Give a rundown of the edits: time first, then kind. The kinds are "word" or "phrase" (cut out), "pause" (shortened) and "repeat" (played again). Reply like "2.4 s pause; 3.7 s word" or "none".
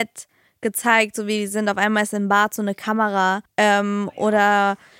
3.5 s pause